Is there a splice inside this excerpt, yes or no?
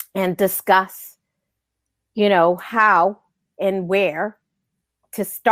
no